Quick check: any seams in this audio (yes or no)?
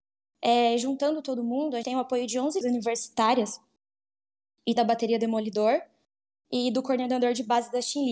yes